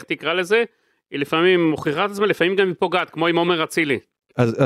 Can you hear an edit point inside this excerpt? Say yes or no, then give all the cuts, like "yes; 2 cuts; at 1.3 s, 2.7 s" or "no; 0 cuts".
no; 0 cuts